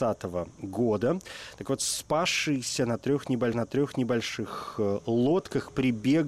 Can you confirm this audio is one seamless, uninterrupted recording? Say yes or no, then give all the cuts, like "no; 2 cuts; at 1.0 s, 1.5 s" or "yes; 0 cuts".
no; 1 cut; at 3.5 s